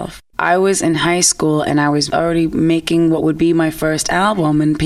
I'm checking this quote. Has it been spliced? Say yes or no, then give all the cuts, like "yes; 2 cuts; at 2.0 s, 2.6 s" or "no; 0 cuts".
no; 0 cuts